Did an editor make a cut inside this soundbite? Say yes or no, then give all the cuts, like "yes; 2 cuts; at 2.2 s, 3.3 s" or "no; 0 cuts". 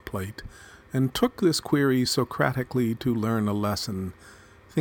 no; 0 cuts